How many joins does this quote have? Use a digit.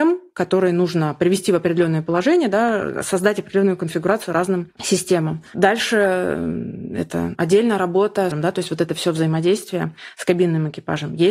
3